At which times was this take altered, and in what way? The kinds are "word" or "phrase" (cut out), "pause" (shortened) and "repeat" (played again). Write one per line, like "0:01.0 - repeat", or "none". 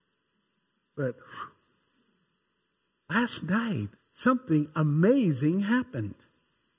0:04.0 - pause